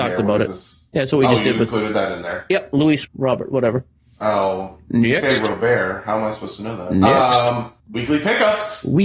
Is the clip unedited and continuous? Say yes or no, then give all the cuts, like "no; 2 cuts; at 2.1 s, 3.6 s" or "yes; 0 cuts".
no; 2 cuts; at 3.0 s, 7.8 s